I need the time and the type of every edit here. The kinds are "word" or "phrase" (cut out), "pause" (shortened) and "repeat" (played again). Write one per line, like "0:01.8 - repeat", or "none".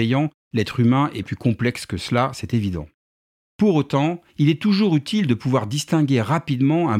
0:01.2 - word
0:04.3 - pause